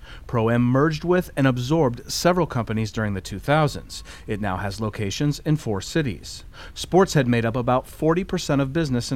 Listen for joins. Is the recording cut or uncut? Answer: uncut